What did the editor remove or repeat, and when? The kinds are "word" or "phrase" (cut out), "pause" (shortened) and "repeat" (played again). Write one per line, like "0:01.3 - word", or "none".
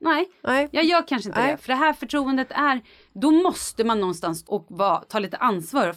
0:04.5 - word